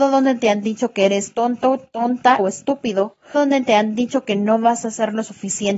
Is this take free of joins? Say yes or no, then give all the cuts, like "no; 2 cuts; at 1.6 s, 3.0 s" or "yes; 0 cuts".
no; 2 cuts; at 2.4 s, 3.4 s